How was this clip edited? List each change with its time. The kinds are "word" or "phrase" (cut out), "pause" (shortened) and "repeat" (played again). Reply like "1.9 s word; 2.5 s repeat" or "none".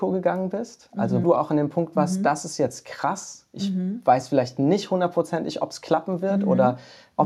1.2 s word